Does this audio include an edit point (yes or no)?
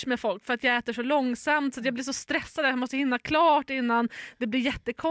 no